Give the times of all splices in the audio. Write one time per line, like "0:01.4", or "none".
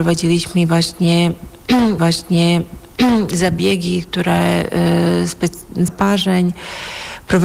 0:02.0
0:05.9